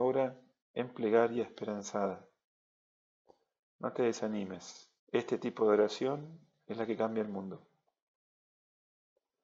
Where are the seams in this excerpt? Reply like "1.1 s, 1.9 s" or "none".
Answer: 5.0 s